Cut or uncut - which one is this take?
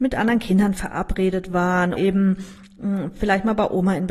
cut